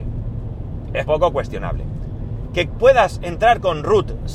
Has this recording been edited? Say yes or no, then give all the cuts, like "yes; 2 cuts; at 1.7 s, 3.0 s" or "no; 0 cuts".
yes; 1 cut; at 1.1 s